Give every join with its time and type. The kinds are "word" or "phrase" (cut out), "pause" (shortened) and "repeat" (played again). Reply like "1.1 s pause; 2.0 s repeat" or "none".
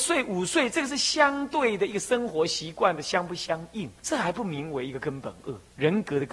4.0 s pause